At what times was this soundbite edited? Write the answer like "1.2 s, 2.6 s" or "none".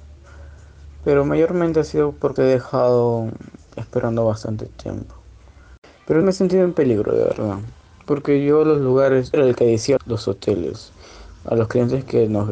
2.4 s, 6.2 s, 9.3 s, 10.0 s

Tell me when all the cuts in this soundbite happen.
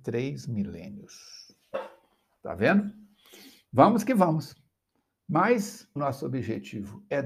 6.0 s

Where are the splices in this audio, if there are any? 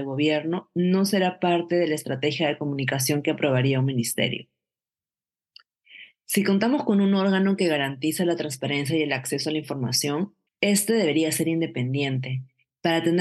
10.5 s

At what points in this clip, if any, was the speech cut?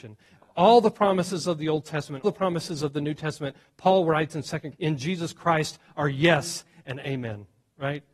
2.2 s, 4.7 s

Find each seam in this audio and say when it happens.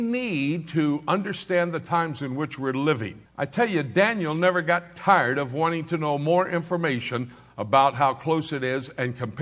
3.3 s

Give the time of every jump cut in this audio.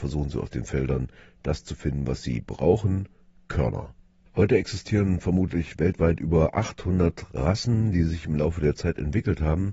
none

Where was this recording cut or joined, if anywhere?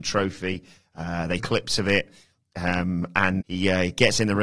1.4 s, 3.4 s

